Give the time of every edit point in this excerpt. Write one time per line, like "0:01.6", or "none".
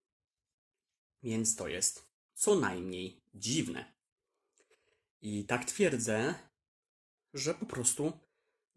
none